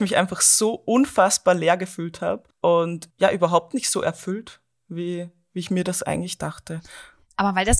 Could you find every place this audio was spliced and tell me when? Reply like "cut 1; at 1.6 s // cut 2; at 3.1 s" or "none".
cut 1; at 2.5 s